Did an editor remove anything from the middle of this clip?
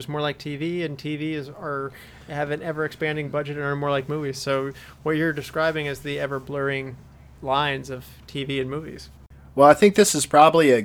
no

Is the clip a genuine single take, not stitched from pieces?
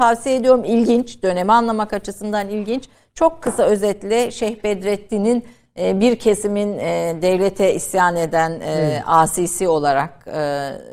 yes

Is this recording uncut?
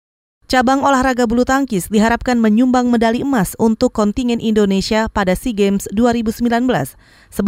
yes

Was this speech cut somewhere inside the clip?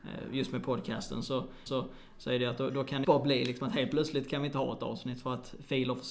yes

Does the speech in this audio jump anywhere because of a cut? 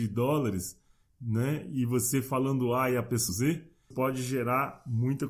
yes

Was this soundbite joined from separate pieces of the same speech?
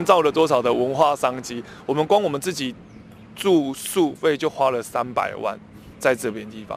no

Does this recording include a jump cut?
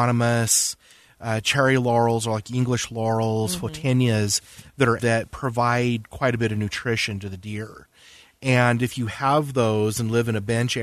yes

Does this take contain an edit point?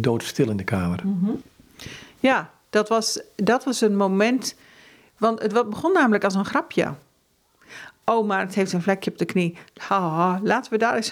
no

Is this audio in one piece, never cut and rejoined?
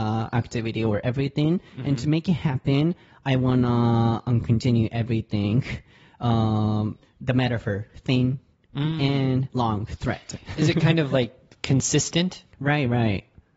yes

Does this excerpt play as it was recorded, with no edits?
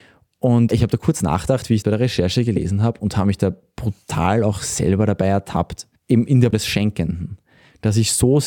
no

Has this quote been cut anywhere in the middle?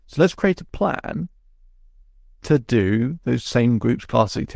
no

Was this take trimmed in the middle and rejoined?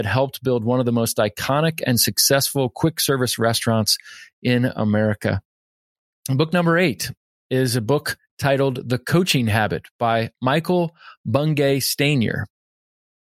no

